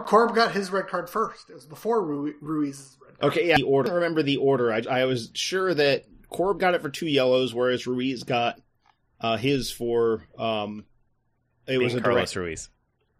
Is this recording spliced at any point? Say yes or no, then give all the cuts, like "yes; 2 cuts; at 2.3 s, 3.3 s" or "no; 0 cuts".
yes; 1 cut; at 4.8 s